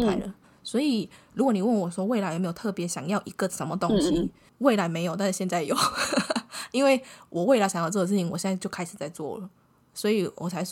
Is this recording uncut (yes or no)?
yes